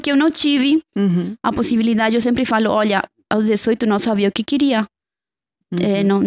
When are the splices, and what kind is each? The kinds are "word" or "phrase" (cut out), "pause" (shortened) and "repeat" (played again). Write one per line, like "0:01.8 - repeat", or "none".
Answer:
none